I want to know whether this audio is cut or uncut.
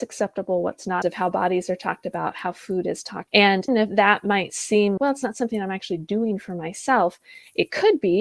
cut